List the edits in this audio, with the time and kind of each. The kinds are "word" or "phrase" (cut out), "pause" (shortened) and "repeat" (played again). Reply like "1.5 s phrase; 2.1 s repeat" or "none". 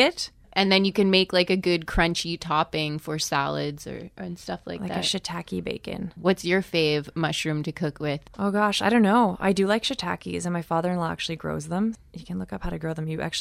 8.3 s pause